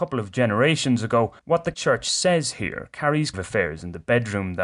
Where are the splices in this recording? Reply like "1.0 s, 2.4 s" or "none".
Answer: 1.4 s, 1.7 s, 3.3 s